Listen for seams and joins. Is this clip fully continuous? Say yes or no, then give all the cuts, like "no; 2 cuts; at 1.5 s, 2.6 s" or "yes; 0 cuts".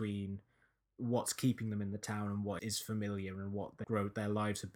no; 2 cuts; at 2.6 s, 3.8 s